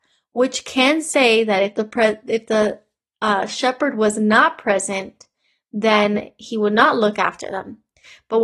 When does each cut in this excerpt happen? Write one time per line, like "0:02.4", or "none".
none